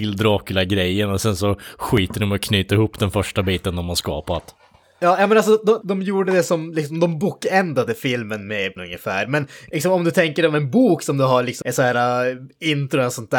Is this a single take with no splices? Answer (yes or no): no